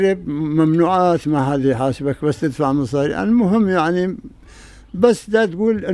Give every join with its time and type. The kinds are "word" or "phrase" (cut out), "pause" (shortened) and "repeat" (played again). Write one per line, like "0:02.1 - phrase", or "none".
none